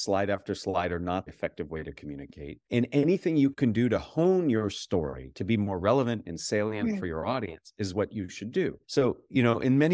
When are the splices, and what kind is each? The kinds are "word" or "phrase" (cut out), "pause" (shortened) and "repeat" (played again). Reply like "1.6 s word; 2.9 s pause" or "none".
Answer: 1.3 s word; 2.6 s pause; 8.8 s pause